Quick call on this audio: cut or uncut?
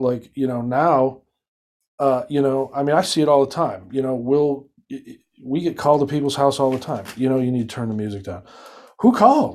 uncut